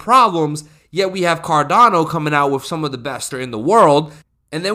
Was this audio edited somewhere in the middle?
yes; 1 cut; at 3.3 s

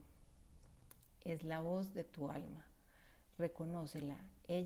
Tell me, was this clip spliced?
no; 0 cuts

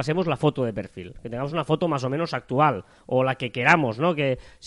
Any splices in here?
no; 0 cuts

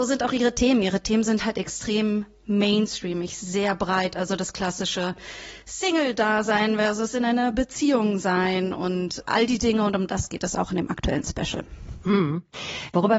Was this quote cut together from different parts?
yes; 1 cut; at 9.2 s

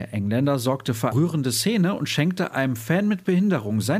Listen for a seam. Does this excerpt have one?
yes; 1 cut; at 1.1 s

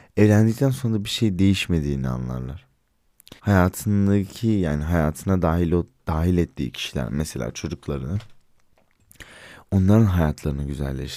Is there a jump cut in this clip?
yes; 1 cut; at 3.4 s

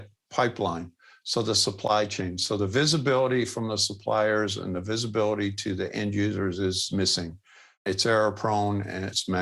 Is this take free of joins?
yes; 0 cuts

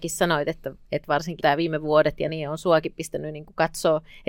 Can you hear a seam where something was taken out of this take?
yes; 2 cuts; at 1.4 s, 2.3 s

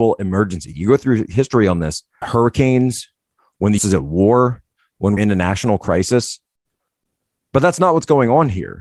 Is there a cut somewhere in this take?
yes; 3 cuts; at 2.2 s, 3.8 s, 5.2 s

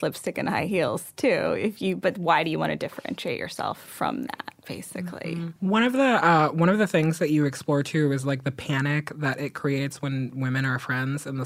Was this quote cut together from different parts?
yes; 1 cut; at 5.6 s

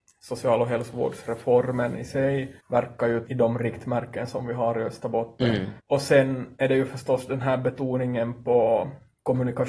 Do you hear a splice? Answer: yes; 3 cuts; at 2.6 s, 3.3 s, 5.8 s

